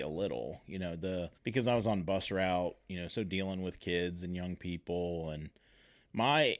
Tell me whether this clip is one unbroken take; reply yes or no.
no